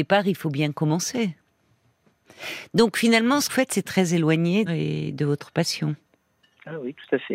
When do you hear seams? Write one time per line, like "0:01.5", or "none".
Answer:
0:03.5
0:04.7